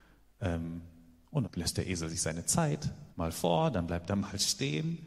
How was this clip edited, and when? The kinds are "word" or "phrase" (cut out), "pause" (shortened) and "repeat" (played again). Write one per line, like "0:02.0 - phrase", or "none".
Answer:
0:01.4 - word
0:03.1 - phrase